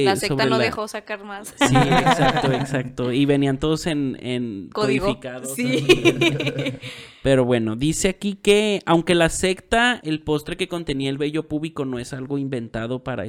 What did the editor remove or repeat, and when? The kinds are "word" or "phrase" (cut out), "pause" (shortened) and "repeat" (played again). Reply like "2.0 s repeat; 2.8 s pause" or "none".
10.0 s phrase